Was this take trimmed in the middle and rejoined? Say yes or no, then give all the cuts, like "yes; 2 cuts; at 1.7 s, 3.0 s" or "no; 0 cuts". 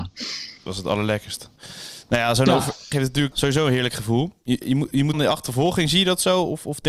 yes; 4 cuts; at 2.9 s, 3.3 s, 4.6 s, 5.1 s